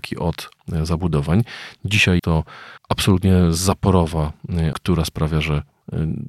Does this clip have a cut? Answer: yes; 3 cuts; at 2.2 s, 2.8 s, 4.7 s

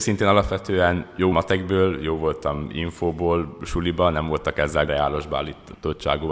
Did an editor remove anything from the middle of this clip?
yes; 2 cuts; at 1.3 s, 4.9 s

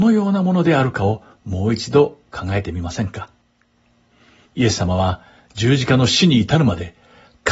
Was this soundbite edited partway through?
no; 0 cuts

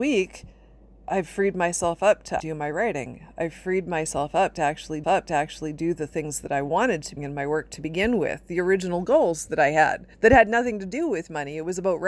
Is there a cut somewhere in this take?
yes; 4 cuts; at 2.4 s, 5.0 s, 7.2 s, 10.1 s

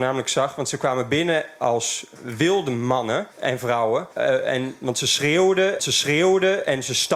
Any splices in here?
yes; 3 cuts; at 3.3 s, 4.1 s, 5.8 s

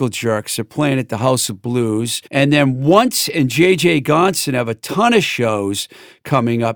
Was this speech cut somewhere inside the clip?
yes; 1 cut; at 2.3 s

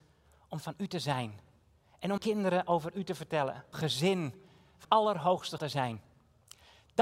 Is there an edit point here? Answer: yes; 4 cuts; at 2.2 s, 3.7 s, 4.8 s, 5.6 s

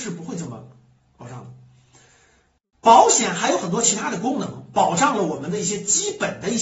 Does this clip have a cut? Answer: no; 0 cuts

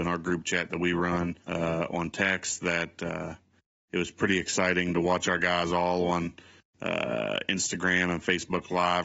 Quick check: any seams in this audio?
yes; 1 cut; at 1.4 s

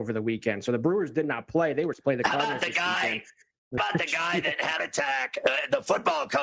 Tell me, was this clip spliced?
yes; 3 cuts; at 1.9 s, 3.8 s, 4.8 s

